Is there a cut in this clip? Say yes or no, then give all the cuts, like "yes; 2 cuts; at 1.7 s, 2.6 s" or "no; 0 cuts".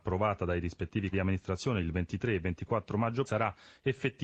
yes; 2 cuts; at 1.1 s, 3.3 s